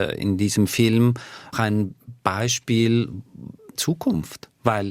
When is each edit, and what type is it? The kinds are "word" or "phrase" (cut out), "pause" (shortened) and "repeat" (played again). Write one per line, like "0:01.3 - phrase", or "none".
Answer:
0:01.5 - word
0:03.8 - word